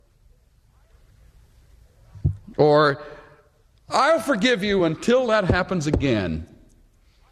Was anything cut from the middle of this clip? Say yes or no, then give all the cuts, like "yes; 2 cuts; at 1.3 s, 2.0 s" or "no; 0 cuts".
no; 0 cuts